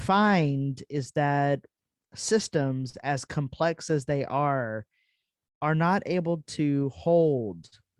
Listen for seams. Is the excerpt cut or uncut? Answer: uncut